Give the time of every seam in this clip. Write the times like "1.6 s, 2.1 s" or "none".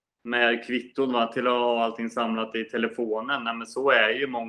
none